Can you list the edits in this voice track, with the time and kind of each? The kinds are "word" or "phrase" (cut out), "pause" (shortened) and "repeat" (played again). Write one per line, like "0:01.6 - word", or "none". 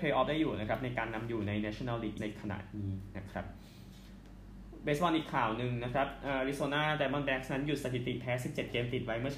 0:02.2 - word